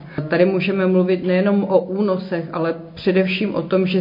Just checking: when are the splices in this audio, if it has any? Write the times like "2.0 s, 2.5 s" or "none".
none